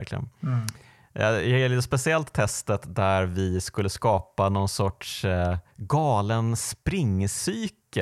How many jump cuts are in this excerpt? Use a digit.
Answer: 1